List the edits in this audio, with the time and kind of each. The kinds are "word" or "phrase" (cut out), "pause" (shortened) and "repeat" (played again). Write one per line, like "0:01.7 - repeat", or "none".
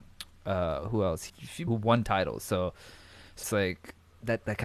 0:01.3 - word
0:01.7 - word
0:03.4 - word